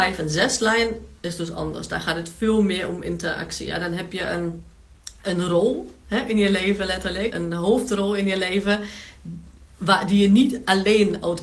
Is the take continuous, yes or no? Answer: no